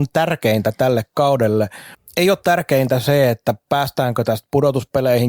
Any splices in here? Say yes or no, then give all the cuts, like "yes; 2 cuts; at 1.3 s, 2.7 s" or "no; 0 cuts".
yes; 1 cut; at 1.9 s